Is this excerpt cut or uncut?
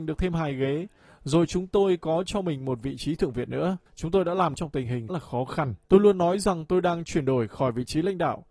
cut